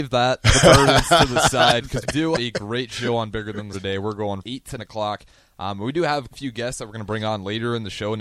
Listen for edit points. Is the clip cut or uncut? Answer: cut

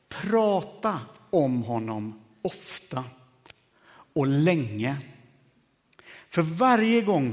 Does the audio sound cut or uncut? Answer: uncut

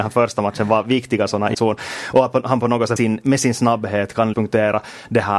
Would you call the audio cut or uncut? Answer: cut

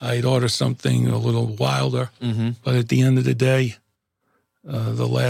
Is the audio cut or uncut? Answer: uncut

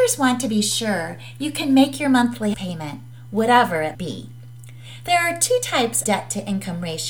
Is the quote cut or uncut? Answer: cut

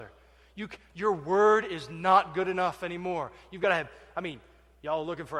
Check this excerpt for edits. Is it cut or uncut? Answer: uncut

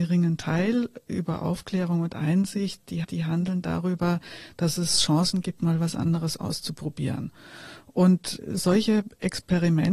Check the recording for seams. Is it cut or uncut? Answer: cut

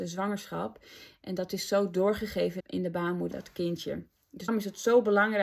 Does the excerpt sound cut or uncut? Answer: cut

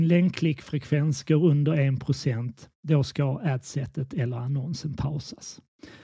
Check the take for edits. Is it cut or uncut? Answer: uncut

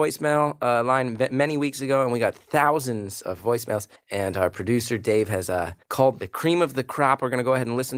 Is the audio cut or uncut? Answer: cut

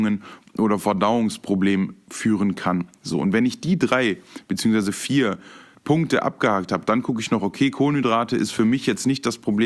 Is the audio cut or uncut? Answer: cut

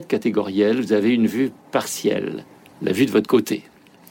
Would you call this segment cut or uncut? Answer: uncut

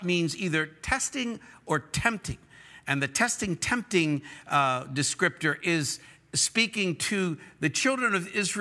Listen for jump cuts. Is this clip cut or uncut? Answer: uncut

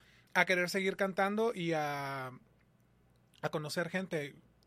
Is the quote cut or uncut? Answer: uncut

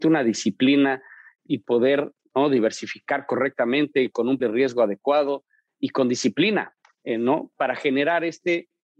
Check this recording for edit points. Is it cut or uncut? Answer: cut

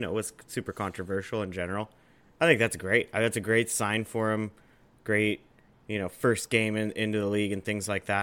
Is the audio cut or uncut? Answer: uncut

